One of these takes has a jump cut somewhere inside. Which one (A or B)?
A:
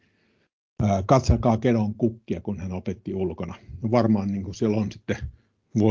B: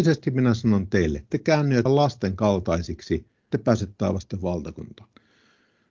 B